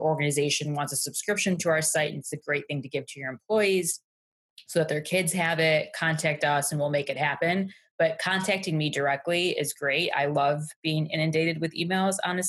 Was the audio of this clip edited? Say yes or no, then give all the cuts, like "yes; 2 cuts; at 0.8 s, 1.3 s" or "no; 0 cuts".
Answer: no; 0 cuts